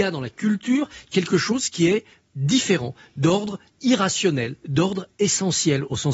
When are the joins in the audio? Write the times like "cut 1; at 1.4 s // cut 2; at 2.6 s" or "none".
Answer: none